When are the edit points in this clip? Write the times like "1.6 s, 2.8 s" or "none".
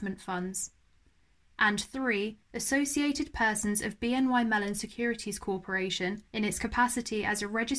2.4 s, 6.3 s